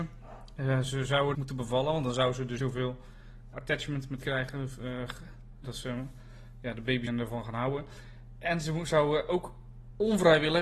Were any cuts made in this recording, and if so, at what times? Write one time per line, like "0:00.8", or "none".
0:01.3
0:02.6
0:03.5
0:04.2
0:05.6
0:07.1

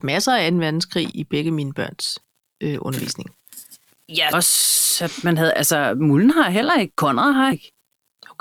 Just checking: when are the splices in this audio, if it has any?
0:01.1
0:04.3
0:07.5

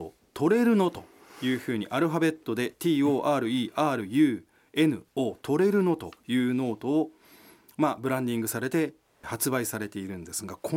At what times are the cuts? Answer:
none

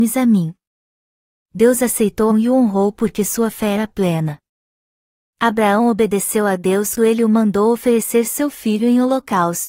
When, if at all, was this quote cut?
0:02.3
0:07.0

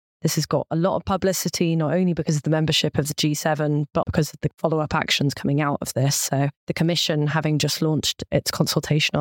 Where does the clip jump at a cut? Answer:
0:04.0
0:06.6

